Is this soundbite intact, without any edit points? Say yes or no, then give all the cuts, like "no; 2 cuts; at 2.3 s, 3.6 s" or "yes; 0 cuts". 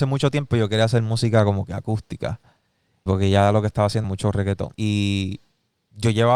no; 3 cuts; at 3.1 s, 4.0 s, 4.7 s